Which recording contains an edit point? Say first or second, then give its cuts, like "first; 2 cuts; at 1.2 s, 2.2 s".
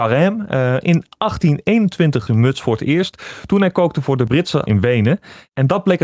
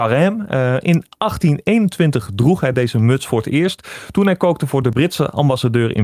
first; 2 cuts; at 2.3 s, 4.7 s